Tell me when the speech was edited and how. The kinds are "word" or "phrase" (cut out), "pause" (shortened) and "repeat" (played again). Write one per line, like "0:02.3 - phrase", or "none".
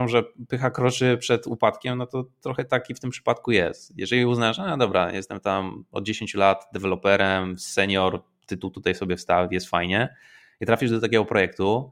none

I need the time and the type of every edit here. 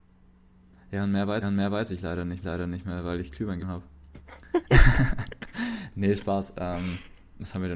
0:01.4 - repeat
0:02.4 - repeat
0:03.6 - word

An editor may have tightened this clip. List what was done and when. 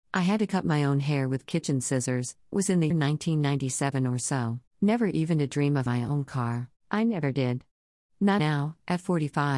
0:02.5 - word
0:02.9 - word
0:04.7 - pause
0:05.9 - word
0:06.8 - pause
0:08.4 - word

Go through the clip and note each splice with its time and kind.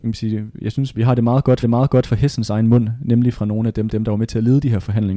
0:00.9 - word
0:01.6 - repeat
0:03.9 - repeat

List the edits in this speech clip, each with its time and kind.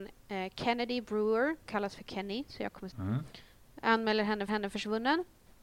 0:01.7 - phrase
0:02.9 - phrase
0:04.5 - repeat

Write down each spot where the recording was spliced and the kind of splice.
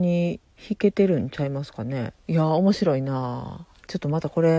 0:02.2 - pause

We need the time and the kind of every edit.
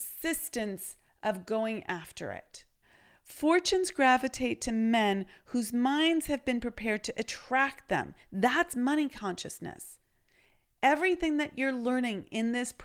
0:02.8 - pause

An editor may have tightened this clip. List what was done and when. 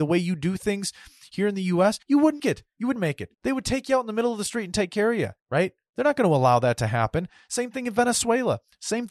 0:02.0 - pause
0:02.4 - word
0:03.0 - word
0:03.3 - pause
0:05.4 - pause

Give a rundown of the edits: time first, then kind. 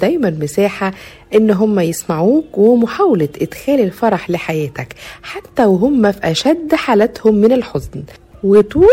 none

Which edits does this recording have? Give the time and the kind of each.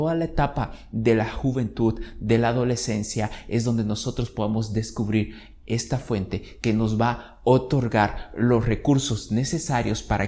none

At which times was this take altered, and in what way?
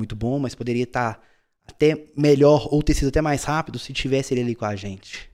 none

